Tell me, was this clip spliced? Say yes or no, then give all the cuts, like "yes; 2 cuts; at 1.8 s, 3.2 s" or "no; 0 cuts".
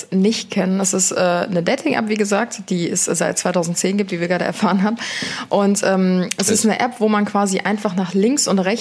no; 0 cuts